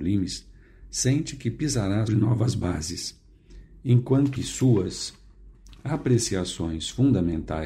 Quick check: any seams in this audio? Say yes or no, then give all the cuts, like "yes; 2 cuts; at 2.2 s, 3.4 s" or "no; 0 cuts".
yes; 2 cuts; at 2.1 s, 4.4 s